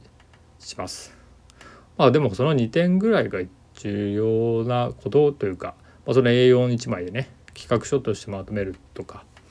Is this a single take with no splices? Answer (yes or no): yes